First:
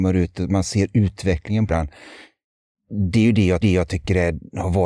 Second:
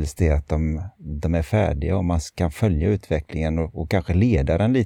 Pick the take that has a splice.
first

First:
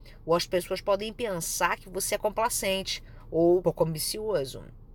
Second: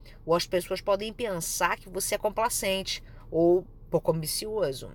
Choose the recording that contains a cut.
first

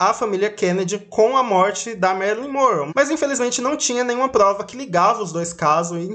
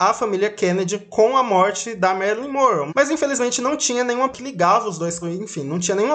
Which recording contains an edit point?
second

